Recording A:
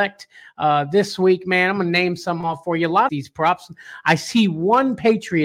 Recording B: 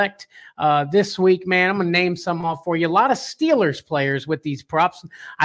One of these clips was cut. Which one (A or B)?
A